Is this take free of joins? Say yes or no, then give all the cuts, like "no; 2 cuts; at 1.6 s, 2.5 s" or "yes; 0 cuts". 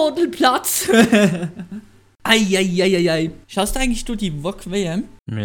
no; 1 cut; at 3.4 s